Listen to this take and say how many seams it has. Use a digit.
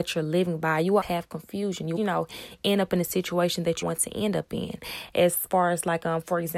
3